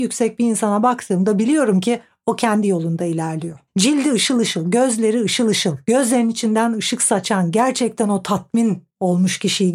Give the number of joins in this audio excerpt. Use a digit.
2